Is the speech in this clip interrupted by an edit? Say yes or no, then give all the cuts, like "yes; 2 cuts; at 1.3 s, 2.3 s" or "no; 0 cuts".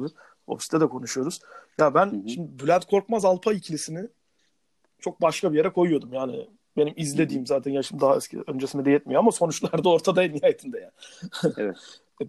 no; 0 cuts